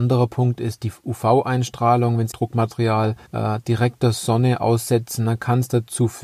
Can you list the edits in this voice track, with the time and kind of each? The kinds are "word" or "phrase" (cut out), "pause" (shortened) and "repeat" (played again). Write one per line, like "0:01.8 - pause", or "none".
0:02.3 - word
0:03.3 - pause